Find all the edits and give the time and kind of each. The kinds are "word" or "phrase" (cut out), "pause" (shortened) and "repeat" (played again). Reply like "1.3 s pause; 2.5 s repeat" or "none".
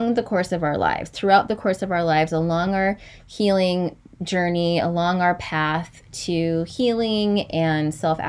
none